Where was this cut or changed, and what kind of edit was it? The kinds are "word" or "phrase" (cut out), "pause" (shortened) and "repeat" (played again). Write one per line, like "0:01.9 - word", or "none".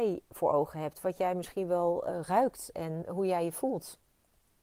0:02.7 - word